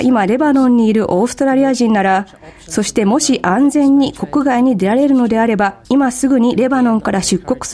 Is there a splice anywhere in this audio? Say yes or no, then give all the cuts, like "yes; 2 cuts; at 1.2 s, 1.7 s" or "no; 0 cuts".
yes; 1 cut; at 5.8 s